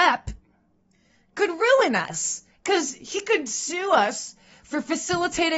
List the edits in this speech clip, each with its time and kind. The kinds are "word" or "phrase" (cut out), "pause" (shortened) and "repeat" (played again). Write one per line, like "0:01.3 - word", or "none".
none